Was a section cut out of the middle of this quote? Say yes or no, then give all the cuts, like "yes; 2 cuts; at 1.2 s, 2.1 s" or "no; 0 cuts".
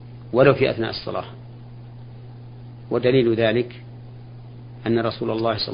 no; 0 cuts